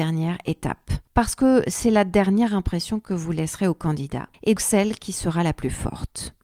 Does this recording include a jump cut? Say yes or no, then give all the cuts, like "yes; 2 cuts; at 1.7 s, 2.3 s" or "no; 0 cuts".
yes; 1 cut; at 4.6 s